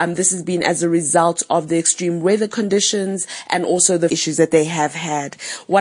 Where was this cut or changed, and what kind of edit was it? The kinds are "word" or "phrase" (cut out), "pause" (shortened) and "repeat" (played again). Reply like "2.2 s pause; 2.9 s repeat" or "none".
4.1 s phrase